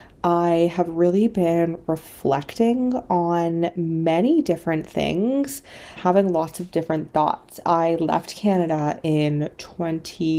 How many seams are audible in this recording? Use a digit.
1